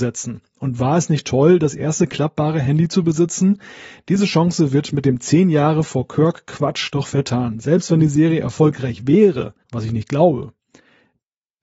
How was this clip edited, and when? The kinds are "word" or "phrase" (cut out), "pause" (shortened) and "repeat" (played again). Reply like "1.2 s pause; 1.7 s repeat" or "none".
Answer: 9.6 s pause